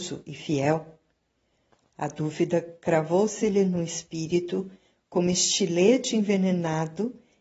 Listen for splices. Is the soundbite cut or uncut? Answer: uncut